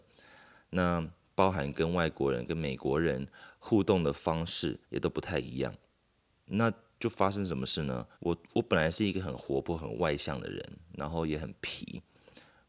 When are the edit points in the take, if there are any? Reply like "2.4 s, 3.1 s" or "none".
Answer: 4.8 s, 8.1 s